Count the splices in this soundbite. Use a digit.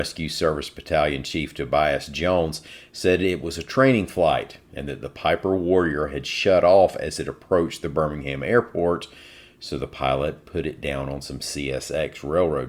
0